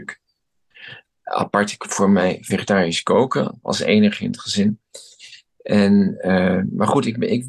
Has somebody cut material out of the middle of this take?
no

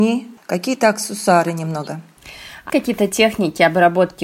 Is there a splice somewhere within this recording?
yes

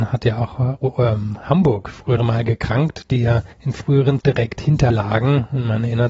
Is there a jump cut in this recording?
yes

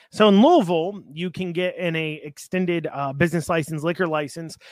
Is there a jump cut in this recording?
no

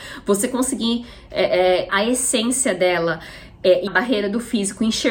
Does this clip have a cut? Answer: yes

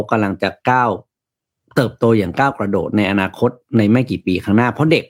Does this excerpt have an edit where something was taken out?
no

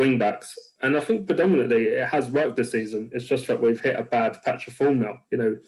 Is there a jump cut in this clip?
no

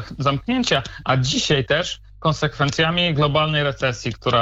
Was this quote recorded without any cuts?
yes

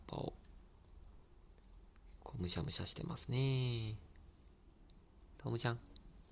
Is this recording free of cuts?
yes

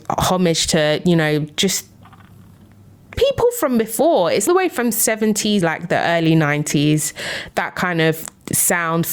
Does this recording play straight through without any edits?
no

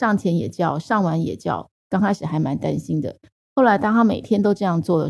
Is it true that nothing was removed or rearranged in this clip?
yes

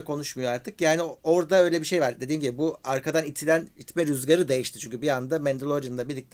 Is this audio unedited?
yes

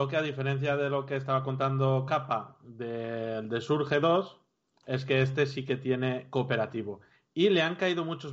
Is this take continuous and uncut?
yes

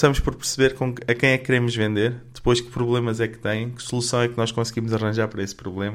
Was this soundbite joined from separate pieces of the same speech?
no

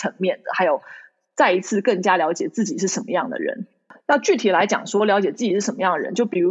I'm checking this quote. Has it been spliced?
no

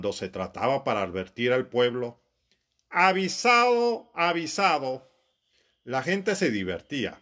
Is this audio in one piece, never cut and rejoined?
yes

